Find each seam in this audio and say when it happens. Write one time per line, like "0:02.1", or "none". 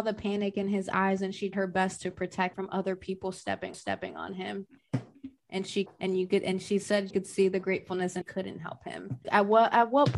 0:01.5
0:02.5
0:03.7
0:05.9
0:07.1
0:08.2
0:09.2